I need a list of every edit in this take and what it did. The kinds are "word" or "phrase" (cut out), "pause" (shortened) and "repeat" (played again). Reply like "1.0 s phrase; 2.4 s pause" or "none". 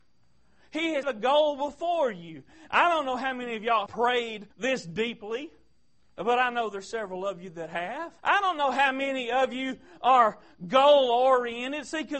1.0 s word; 3.9 s word; 4.5 s pause; 6.0 s pause; 8.2 s pause

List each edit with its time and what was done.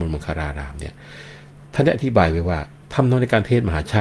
2.8 s pause

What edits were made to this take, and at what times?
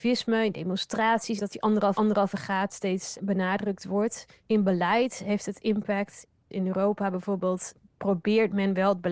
1.4 s word; 2.0 s repeat

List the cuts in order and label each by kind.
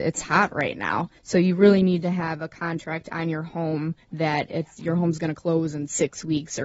1.2 s pause; 4.0 s pause

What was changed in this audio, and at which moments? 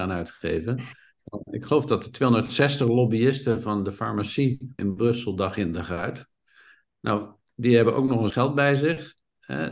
4.8 s word; 8.3 s word

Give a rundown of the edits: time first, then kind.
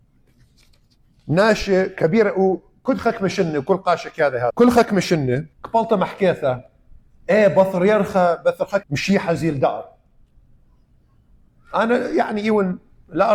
4.5 s word; 5.5 s pause; 8.8 s phrase

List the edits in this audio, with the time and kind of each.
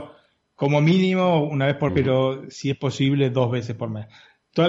1.9 s word

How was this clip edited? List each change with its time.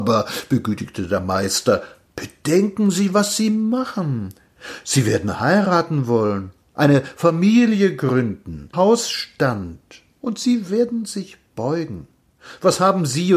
8.7 s word

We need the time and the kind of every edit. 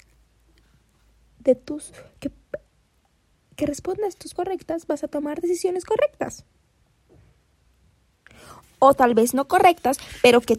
4.4 s word

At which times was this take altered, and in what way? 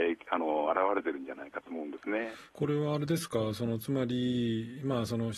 2.5 s pause

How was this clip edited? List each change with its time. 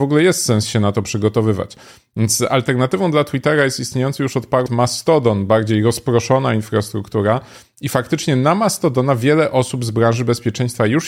4.7 s word

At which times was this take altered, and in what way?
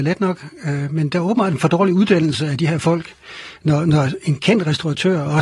none

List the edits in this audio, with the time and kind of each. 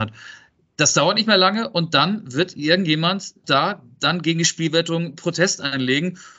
3.4 s word

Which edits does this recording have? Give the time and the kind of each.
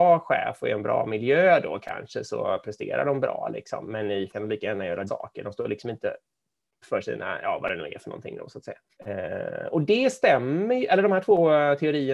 4.3 s phrase; 5.1 s word; 6.8 s word; 8.9 s pause

